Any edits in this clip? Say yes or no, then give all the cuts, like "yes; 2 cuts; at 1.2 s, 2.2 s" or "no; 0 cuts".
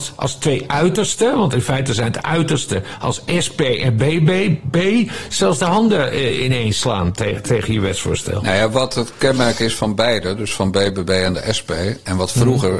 no; 0 cuts